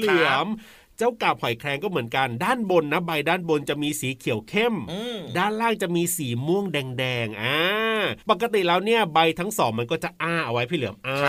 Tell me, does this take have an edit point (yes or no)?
yes